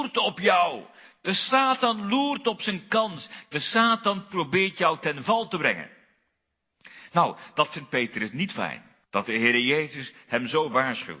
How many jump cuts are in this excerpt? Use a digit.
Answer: 1